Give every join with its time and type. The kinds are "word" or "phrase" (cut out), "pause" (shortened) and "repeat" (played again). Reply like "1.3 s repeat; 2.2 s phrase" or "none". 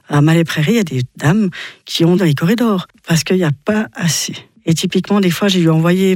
2.2 s word